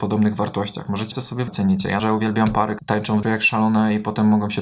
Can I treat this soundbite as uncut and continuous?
no; 5 cuts; at 1.1 s, 1.5 s, 2.0 s, 2.8 s, 3.2 s

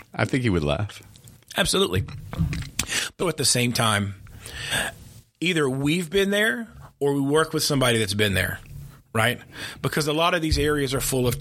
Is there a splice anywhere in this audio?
yes; 1 cut; at 3.2 s

